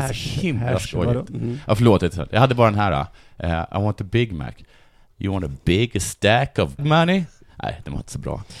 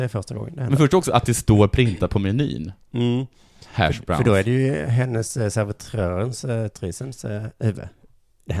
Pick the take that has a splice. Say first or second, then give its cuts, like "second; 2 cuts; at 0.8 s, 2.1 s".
first; 1 cut; at 6.8 s